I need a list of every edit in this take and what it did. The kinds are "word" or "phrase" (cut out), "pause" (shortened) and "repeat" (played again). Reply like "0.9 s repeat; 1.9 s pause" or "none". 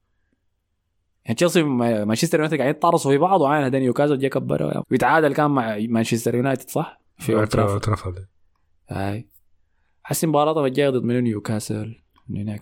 4.8 s word